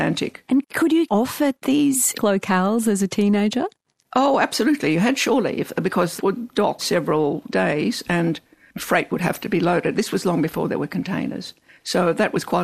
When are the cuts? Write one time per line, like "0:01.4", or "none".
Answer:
0:01.1
0:02.1
0:06.2
0:06.8